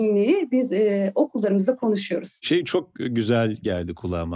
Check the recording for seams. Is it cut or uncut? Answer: uncut